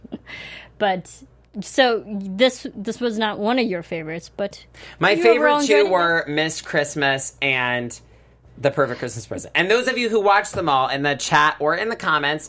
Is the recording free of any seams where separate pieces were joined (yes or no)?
yes